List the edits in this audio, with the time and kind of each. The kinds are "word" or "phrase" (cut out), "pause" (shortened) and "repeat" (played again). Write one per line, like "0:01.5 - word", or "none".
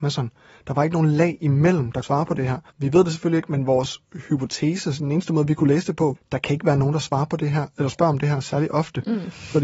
0:02.0 - word
0:02.7 - pause
0:06.1 - word